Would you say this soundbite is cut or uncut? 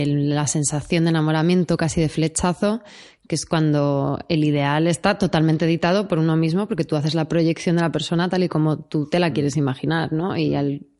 uncut